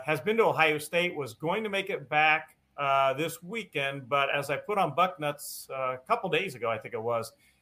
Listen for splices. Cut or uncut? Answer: cut